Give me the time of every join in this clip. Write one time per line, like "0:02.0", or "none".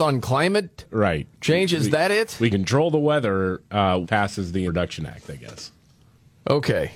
0:01.3
0:02.5
0:04.0
0:04.7